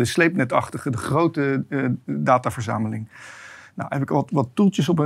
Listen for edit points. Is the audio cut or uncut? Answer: uncut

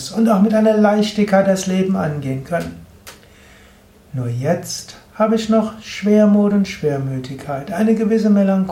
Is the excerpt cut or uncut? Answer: uncut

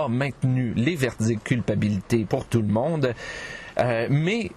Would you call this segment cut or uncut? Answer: cut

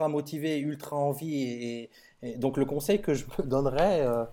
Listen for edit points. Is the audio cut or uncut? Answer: uncut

